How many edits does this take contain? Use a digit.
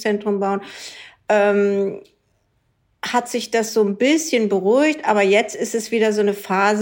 0